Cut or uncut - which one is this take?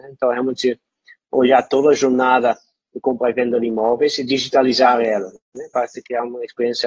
uncut